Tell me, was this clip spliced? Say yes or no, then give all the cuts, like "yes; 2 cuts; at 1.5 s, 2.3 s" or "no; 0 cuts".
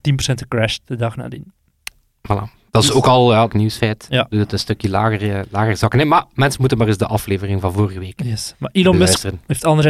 yes; 3 cuts; at 2.7 s, 3.5 s, 4.1 s